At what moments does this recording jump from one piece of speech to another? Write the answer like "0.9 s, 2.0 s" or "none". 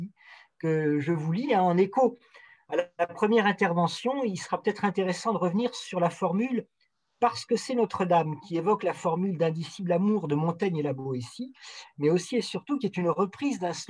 none